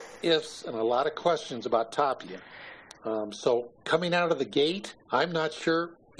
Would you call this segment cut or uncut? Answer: cut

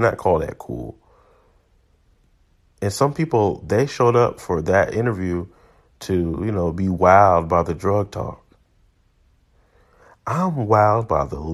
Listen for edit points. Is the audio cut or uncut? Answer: uncut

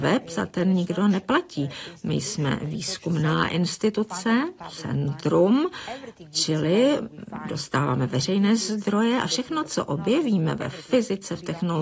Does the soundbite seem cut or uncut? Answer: uncut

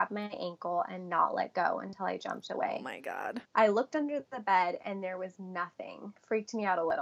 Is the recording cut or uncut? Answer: cut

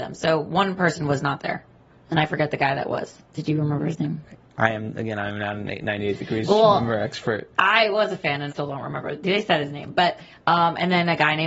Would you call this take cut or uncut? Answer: cut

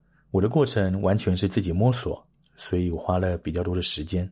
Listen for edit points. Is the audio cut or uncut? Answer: cut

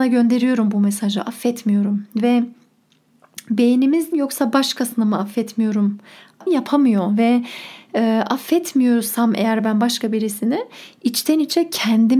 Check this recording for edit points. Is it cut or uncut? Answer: cut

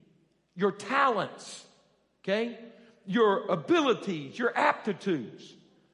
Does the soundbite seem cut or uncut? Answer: uncut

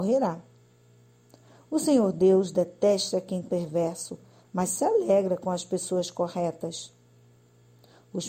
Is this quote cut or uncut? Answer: cut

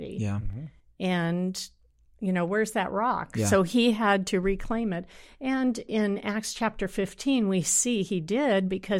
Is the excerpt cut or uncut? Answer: uncut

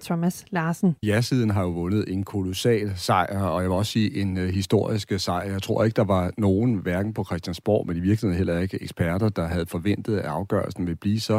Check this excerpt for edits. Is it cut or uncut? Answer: cut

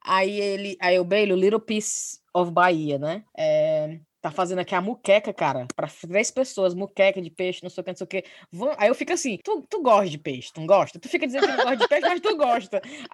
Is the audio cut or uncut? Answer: cut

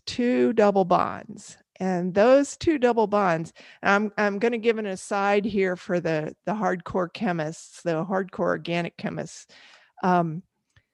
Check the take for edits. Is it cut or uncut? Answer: uncut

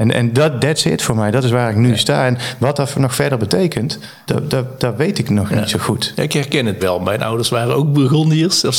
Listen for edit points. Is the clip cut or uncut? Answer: cut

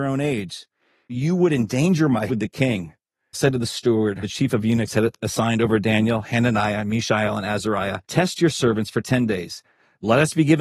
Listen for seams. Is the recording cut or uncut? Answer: cut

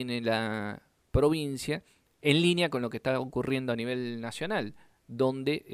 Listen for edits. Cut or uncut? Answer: uncut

